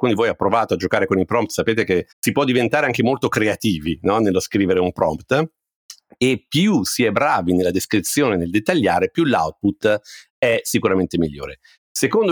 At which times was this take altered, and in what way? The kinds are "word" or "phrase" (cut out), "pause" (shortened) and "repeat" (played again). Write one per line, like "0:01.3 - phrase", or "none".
0:02.1 - pause